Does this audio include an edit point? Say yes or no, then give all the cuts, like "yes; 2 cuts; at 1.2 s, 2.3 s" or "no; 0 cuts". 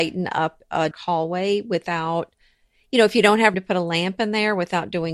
yes; 2 cuts; at 0.9 s, 3.5 s